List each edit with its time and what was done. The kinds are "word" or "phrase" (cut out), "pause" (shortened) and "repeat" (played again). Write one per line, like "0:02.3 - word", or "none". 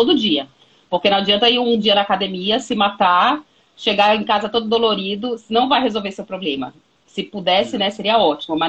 none